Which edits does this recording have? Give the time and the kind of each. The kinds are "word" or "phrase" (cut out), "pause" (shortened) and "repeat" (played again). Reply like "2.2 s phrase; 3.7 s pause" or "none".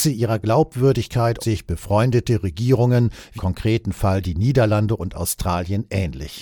1.4 s word; 3.4 s word